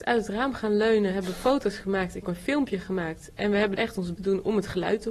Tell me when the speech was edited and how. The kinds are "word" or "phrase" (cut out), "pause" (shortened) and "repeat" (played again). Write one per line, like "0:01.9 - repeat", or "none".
0:02.2 - phrase
0:03.8 - word
0:04.2 - phrase

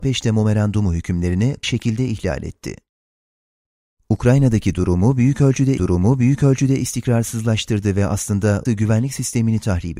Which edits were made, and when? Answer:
0:01.6 - word
0:05.8 - repeat
0:08.7 - word

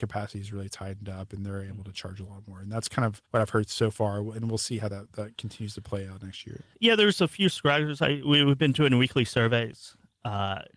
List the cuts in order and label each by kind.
0:03.2 - pause

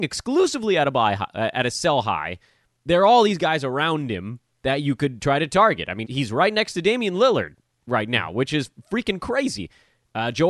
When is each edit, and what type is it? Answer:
0:06.0 - word

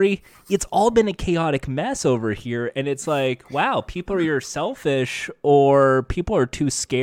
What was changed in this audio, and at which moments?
none

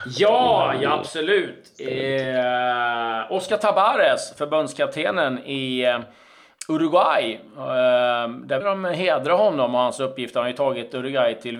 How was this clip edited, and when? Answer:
0:08.6 - word

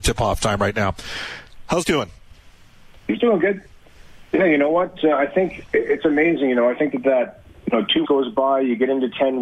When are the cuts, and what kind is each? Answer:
0:01.8 - word
0:08.0 - word

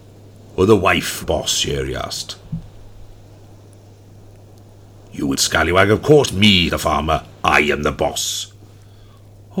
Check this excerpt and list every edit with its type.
0:01.2 - phrase
0:05.4 - word
0:06.3 - word
0:06.7 - word

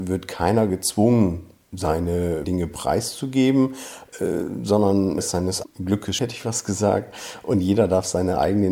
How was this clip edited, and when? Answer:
0:02.4 - word
0:05.2 - word
0:05.6 - word
0:06.2 - word

